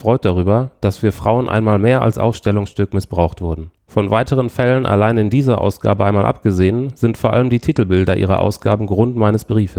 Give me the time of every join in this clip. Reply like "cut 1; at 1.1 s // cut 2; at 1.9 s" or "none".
cut 1; at 3.8 s